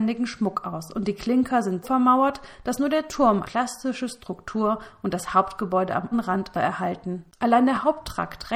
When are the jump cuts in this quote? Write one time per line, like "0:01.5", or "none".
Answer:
0:01.8
0:03.4
0:06.1
0:06.5
0:07.3